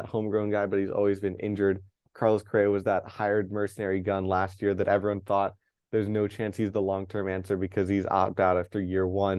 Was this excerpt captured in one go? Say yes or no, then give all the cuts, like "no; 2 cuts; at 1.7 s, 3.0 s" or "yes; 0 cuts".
yes; 0 cuts